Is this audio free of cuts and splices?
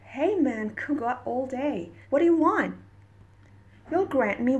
no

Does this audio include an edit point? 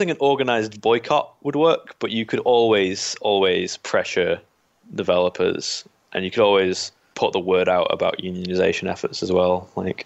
no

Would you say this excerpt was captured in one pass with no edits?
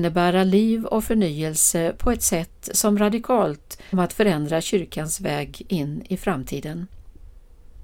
no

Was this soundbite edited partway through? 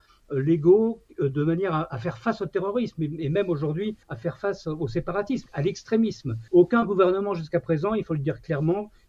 yes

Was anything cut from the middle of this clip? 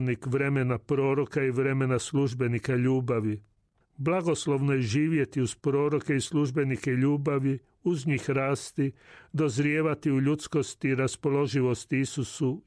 no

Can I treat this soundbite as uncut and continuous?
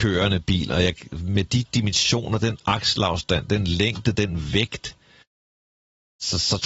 yes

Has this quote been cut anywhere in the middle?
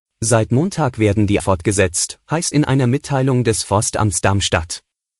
yes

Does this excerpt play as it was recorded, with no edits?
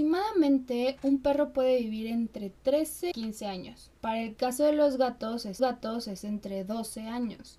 no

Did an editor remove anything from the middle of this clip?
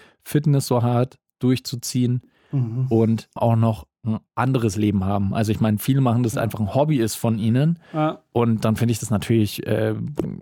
yes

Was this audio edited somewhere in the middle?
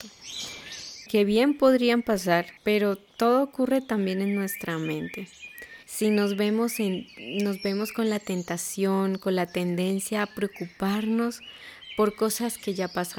yes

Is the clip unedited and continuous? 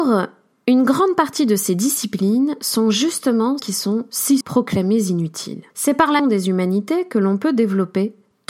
no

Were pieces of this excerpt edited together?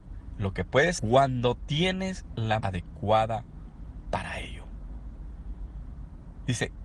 yes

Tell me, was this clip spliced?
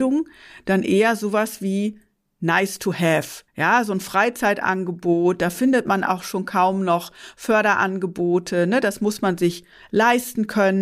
yes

